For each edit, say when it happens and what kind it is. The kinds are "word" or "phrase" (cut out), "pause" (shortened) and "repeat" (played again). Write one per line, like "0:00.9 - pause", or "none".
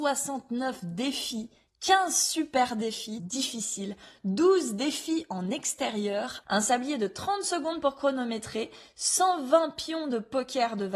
0:03.2 - word